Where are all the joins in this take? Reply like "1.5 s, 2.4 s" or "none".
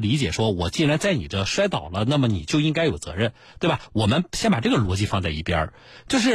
none

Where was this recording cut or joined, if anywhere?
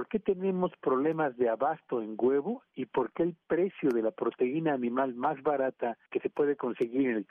6.1 s

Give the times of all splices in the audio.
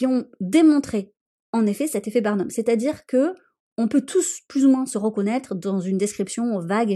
none

